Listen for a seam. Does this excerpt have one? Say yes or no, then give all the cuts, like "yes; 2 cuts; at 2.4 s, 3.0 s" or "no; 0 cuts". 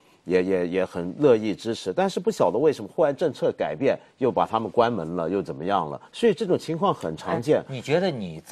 yes; 1 cut; at 6.1 s